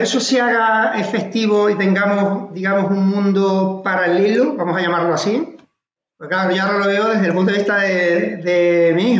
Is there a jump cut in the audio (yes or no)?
no